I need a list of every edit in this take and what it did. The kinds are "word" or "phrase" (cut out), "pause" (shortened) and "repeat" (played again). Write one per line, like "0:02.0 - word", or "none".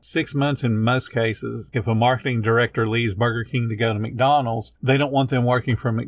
0:01.7 - word

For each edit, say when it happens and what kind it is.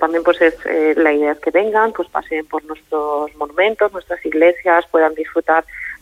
none

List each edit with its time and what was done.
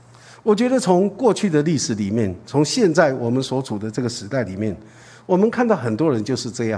none

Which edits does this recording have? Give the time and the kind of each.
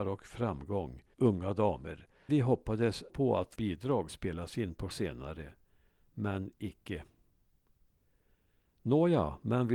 0:01.1 - word
0:02.3 - word
0:03.1 - word
0:03.6 - word
0:04.1 - word
0:04.9 - word

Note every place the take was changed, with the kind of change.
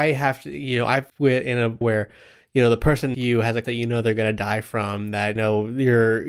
0:01.1 - word
0:01.8 - word
0:03.1 - word
0:03.6 - word
0:05.4 - word

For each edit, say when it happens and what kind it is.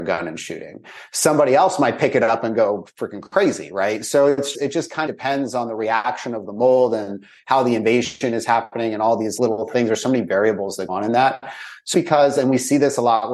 0:04.5 - word
0:05.1 - word
0:09.4 - word
0:10.9 - word
0:11.9 - word

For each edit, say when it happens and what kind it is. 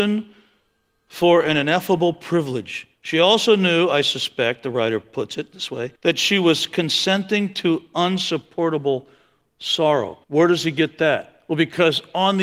0:02.9 - pause
0:06.0 - pause
0:10.2 - pause

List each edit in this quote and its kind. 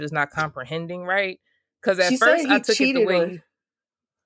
none

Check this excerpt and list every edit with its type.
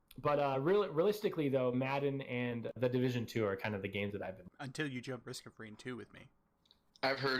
0:02.8 - word
0:04.5 - pause
0:05.2 - word

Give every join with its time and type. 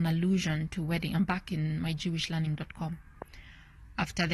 none

